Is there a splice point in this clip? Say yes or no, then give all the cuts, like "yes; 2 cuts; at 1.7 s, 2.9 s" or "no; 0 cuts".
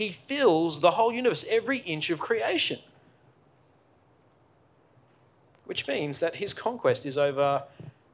no; 0 cuts